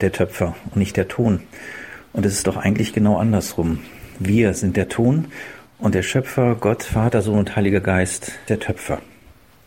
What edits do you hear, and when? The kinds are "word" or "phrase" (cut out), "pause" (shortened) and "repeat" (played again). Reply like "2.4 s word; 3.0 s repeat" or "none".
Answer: 8.5 s word